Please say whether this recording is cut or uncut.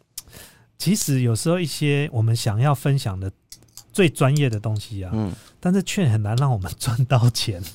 uncut